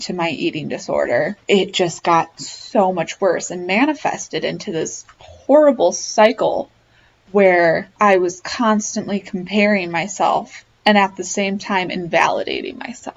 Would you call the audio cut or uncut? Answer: cut